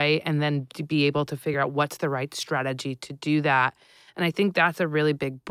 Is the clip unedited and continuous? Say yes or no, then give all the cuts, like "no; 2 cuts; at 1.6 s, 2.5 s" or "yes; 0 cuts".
yes; 0 cuts